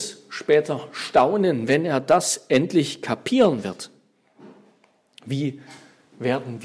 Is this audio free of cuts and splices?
yes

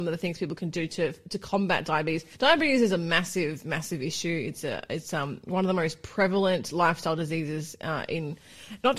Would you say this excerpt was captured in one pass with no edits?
no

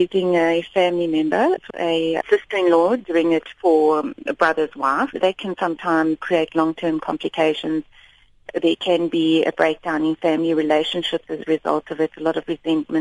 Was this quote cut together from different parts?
yes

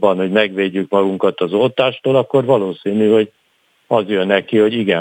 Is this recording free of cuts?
yes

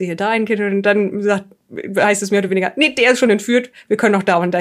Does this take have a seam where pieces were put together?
no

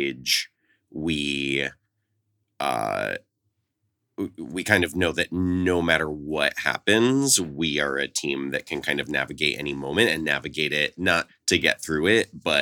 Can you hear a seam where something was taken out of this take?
yes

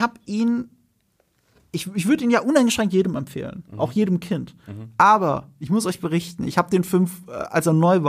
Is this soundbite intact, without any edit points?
yes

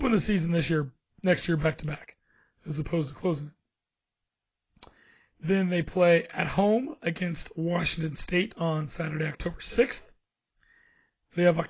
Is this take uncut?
yes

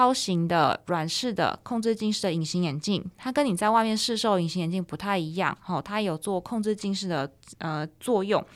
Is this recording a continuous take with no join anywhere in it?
yes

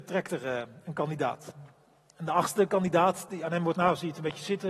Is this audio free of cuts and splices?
no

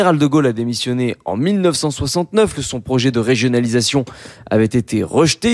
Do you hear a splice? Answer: yes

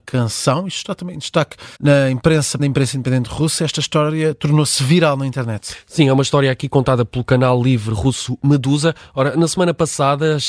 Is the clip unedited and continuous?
no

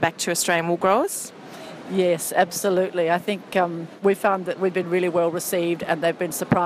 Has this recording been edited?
no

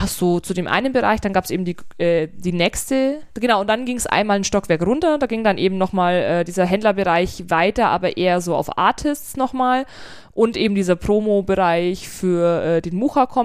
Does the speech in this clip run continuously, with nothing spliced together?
yes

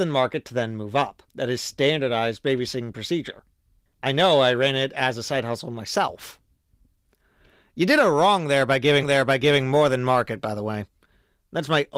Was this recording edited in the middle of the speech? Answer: yes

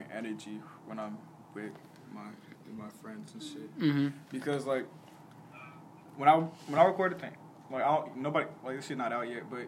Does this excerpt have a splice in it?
no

